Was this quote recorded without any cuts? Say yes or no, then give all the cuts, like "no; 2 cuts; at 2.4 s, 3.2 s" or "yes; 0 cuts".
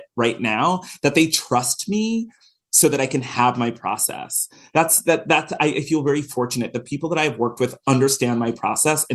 yes; 0 cuts